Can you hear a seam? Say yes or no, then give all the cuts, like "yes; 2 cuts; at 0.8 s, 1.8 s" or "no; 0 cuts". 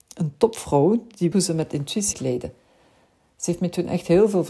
yes; 2 cuts; at 1.3 s, 2.1 s